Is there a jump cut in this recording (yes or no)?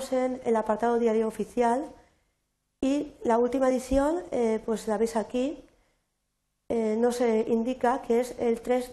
no